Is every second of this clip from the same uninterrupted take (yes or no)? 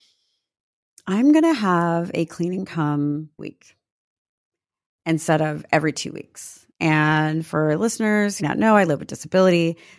no